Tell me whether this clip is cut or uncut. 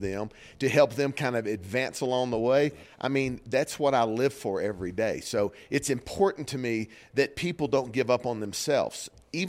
uncut